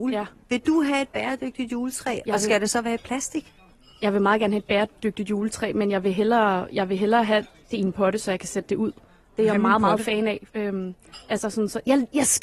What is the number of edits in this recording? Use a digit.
1